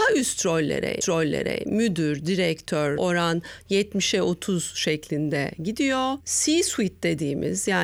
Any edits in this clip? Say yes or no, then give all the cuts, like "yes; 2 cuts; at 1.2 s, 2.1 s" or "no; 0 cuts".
yes; 2 cuts; at 1.0 s, 3.0 s